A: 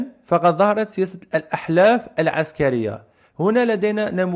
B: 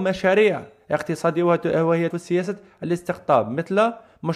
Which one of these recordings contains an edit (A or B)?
B